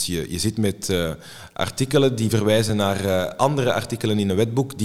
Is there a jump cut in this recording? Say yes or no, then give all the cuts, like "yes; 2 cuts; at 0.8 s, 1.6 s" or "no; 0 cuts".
no; 0 cuts